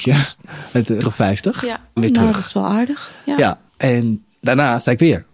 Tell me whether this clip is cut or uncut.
cut